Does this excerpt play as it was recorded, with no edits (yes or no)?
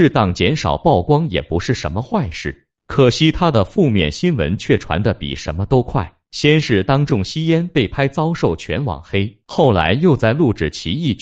no